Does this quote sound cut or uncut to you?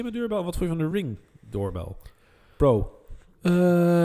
uncut